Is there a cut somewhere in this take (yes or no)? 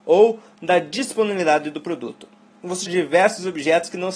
yes